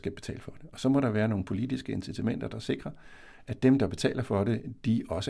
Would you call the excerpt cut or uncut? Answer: uncut